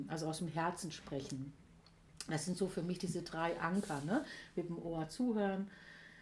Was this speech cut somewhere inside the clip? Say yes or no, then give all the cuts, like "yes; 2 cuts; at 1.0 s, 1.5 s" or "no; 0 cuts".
no; 0 cuts